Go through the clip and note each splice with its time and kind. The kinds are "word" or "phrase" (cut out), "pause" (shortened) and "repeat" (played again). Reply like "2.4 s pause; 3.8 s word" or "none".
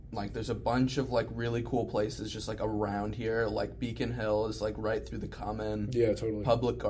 none